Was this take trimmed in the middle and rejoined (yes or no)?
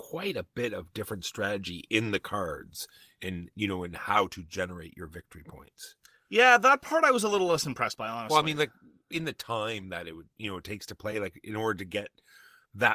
no